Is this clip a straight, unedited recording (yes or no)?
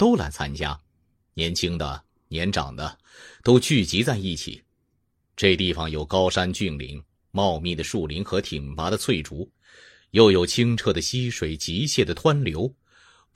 yes